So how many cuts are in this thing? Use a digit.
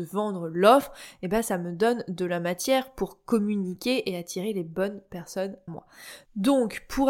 1